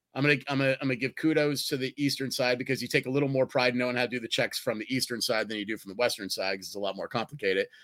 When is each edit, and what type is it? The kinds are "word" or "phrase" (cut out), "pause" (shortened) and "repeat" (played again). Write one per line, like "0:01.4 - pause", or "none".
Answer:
none